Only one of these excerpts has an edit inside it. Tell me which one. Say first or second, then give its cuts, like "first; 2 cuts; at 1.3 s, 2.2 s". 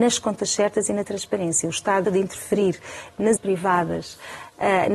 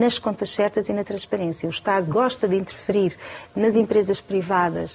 first; 2 cuts; at 2.0 s, 3.4 s